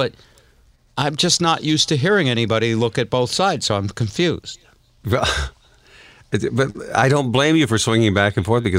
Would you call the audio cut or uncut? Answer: uncut